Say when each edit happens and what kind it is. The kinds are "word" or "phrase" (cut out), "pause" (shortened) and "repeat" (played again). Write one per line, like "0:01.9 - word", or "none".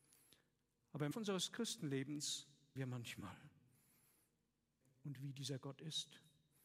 0:01.1 - word
0:02.8 - word
0:04.8 - word